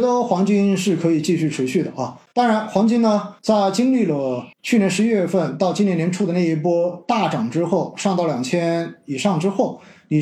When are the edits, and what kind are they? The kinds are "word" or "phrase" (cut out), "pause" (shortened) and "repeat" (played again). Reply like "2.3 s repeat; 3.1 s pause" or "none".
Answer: 2.3 s pause; 3.4 s pause; 4.5 s pause